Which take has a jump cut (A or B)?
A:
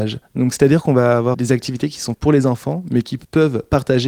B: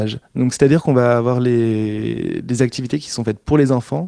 A